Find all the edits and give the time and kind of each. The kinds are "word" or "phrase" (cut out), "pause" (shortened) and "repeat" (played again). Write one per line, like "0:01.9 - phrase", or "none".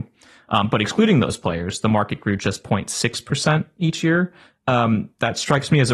none